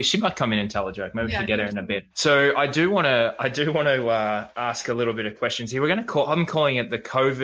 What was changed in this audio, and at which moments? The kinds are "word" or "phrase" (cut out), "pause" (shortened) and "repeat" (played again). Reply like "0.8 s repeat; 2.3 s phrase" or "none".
2.1 s pause; 4.5 s pause